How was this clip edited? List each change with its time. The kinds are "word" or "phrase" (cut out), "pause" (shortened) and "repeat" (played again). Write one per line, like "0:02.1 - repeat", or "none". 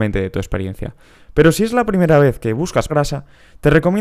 0:02.9 - word